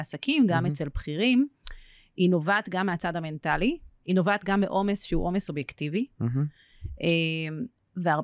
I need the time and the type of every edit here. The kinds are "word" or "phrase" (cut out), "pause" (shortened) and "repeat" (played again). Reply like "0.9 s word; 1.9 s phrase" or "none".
none